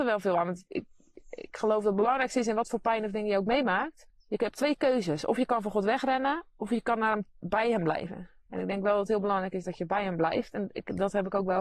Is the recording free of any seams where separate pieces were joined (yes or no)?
no